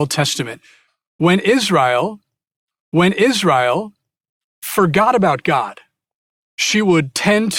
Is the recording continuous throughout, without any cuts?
no; 1 cut; at 2.7 s

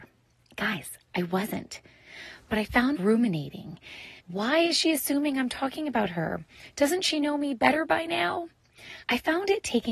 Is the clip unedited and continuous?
no; 3 cuts; at 2.9 s, 4.2 s, 9.0 s

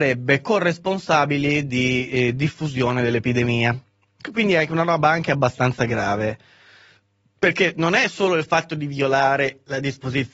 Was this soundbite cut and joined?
no; 0 cuts

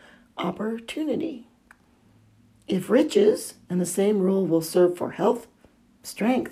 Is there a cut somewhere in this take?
no; 0 cuts

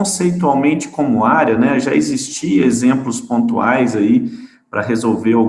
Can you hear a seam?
no; 0 cuts

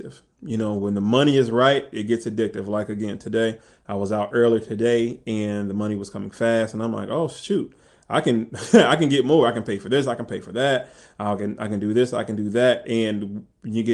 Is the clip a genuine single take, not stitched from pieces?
yes; 0 cuts

